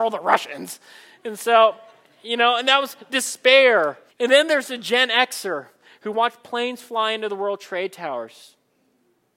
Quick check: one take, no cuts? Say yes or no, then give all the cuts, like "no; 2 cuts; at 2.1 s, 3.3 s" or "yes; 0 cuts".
no; 1 cut; at 4.1 s